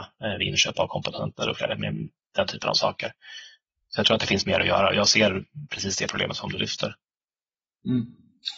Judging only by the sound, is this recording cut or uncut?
uncut